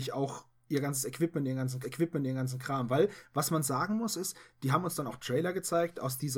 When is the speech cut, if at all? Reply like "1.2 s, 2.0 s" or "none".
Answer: 1.8 s